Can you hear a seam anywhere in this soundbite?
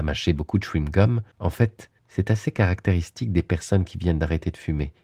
yes; 2 cuts; at 1.3 s, 2.0 s

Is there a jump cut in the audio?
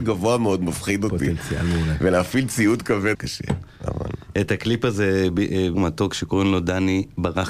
yes; 2 cuts; at 3.1 s, 5.7 s

